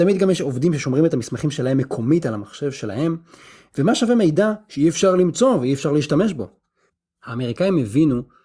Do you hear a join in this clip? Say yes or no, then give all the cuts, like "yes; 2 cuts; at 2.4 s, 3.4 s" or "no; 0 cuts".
no; 0 cuts